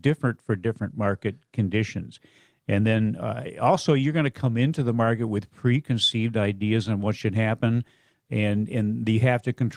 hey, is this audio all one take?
yes; 0 cuts

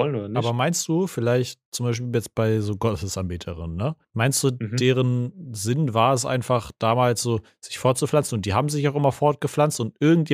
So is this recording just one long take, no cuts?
no; 1 cut; at 4.0 s

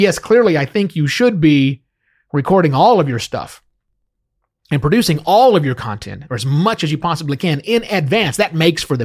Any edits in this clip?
no; 0 cuts

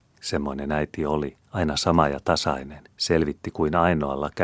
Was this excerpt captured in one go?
no; 2 cuts; at 1.4 s, 2.9 s

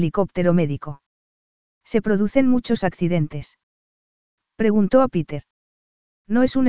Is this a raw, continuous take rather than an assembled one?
yes; 0 cuts

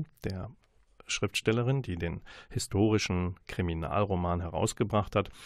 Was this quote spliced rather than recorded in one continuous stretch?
no; 0 cuts

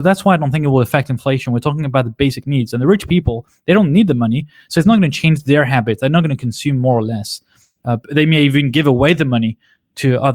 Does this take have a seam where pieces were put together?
no; 0 cuts

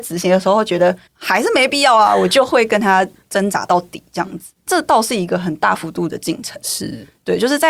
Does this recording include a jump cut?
yes; 1 cut; at 1.1 s

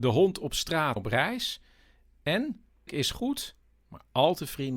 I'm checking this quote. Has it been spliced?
yes; 2 cuts; at 1.0 s, 2.9 s

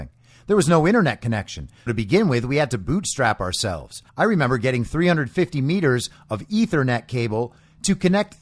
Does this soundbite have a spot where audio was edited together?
yes; 2 cuts; at 1.9 s, 4.1 s

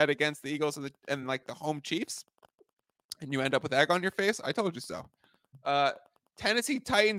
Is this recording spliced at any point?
no; 0 cuts

